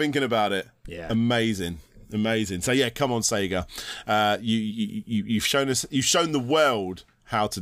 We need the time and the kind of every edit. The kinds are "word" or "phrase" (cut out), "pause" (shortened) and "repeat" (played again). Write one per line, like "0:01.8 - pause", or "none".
none